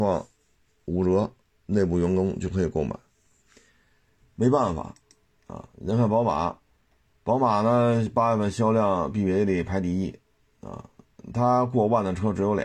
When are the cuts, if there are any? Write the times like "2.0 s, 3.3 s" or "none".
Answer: none